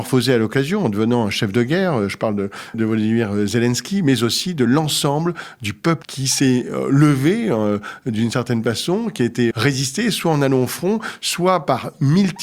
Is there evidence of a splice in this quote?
yes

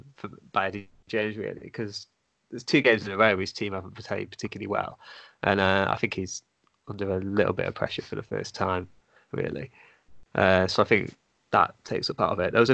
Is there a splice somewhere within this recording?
no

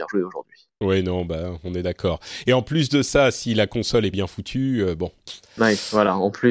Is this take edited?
yes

